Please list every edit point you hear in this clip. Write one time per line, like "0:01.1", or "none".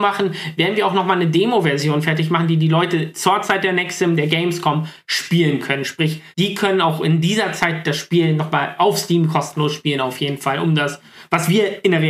0:06.3

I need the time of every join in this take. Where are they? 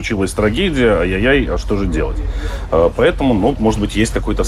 0:03.5

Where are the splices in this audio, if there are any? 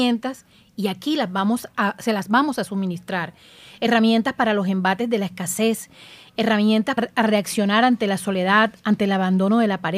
0:07.0

